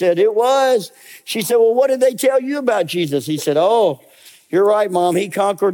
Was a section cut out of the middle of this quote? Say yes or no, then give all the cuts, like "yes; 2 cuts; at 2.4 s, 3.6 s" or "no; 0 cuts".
no; 0 cuts